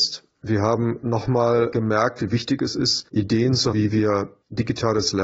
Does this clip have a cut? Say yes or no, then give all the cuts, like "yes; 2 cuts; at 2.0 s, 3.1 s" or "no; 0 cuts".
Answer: yes; 2 cuts; at 3.1 s, 3.7 s